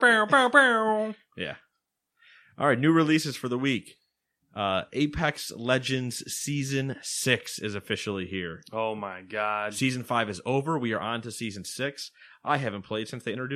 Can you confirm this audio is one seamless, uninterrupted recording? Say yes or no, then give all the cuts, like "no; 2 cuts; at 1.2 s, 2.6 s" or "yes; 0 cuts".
yes; 0 cuts